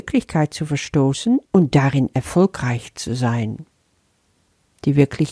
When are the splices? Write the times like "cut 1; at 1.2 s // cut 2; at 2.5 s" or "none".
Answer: cut 1; at 1.4 s